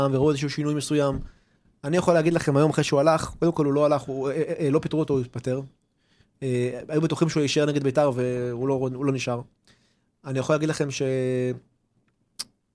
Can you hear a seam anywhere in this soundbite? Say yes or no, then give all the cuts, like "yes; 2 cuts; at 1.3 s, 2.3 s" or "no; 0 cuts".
no; 0 cuts